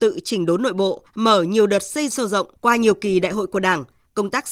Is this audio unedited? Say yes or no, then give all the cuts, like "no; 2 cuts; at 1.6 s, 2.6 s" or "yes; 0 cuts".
no; 3 cuts; at 1.1 s, 2.1 s, 2.6 s